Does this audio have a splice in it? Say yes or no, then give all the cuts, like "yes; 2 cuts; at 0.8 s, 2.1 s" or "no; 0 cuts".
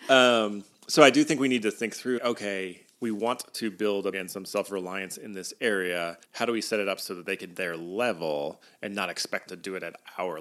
yes; 5 cuts; at 2.2 s, 4.1 s, 6.2 s, 7.5 s, 9.5 s